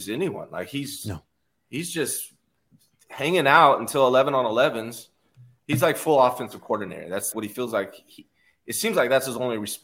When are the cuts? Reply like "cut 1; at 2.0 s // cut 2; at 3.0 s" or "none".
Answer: cut 1; at 7.3 s

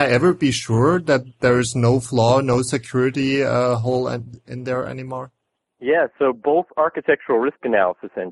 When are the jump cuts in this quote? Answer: none

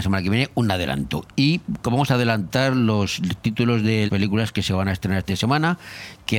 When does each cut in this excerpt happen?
cut 1; at 4.1 s // cut 2; at 5.3 s

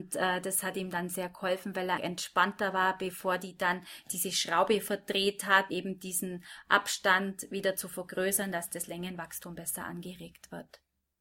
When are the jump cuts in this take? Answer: cut 1; at 2.0 s // cut 2; at 5.7 s

